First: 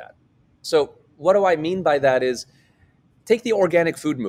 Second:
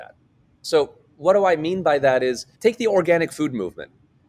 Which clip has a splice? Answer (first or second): second